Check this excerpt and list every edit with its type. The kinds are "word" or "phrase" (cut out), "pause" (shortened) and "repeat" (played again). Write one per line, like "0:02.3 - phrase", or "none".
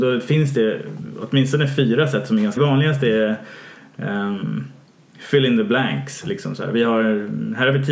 0:02.6 - phrase